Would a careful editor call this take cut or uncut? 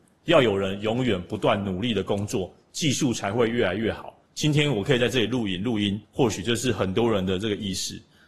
cut